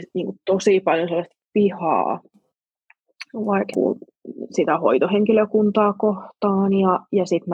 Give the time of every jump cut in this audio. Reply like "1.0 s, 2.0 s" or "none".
3.7 s